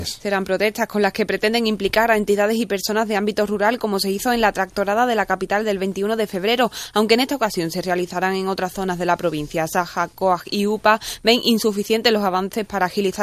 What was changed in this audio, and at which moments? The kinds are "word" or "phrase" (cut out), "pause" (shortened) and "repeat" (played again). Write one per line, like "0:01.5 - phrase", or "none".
none